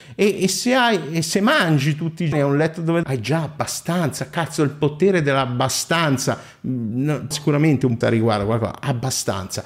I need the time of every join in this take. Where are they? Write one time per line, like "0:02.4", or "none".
0:02.3
0:03.0
0:07.3
0:08.0